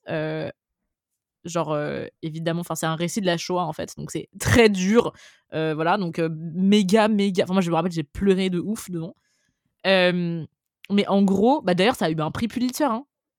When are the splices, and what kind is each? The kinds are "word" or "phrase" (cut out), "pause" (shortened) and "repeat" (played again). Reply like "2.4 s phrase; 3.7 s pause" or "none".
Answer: none